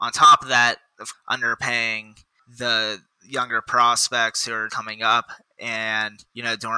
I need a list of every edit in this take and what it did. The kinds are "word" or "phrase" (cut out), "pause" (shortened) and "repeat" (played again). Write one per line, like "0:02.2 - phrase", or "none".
0:01.1 - phrase
0:03.1 - pause
0:04.7 - word